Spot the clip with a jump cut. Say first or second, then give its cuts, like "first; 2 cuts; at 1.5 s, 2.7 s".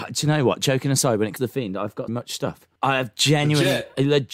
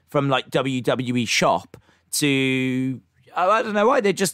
first; 3 cuts; at 1.4 s, 2.1 s, 2.8 s